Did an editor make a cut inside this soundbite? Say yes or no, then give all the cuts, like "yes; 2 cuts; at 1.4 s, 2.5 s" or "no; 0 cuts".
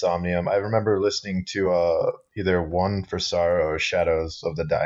no; 0 cuts